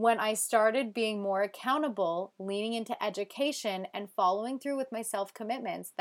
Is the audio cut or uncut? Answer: uncut